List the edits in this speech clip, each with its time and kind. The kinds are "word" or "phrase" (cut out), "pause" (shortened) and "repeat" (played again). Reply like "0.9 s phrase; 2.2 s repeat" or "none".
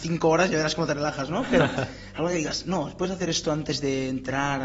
none